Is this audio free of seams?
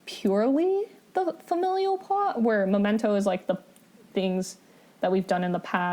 yes; 0 cuts

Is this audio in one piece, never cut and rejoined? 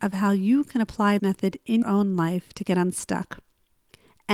no; 2 cuts; at 1.2 s, 1.8 s

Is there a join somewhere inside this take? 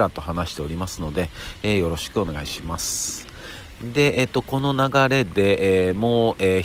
no; 0 cuts

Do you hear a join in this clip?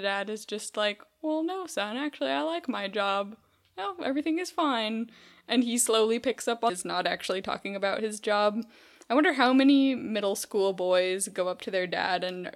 yes; 1 cut; at 6.7 s

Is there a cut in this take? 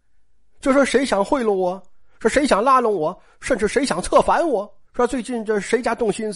yes; 1 cut; at 4.8 s

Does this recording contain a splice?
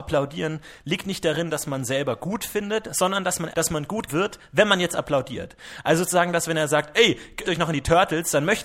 yes; 3 cuts; at 3.5 s, 4.1 s, 7.4 s

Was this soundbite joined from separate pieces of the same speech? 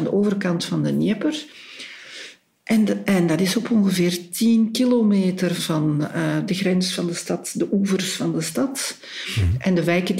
yes; 2 cuts; at 5.6 s, 6.5 s

